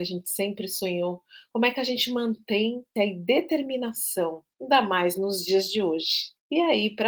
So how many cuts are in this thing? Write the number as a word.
one